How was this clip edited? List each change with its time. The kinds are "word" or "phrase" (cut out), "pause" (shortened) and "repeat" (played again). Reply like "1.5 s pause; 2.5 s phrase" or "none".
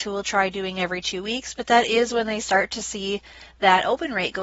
none